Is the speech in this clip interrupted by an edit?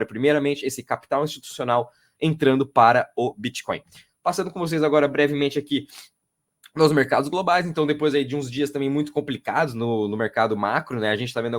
no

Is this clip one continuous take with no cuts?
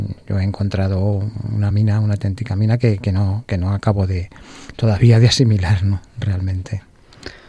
yes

